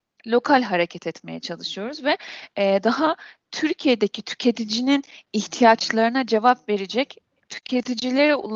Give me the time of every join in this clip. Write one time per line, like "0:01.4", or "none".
none